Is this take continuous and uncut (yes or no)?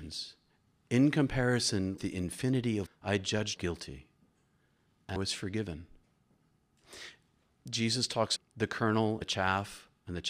no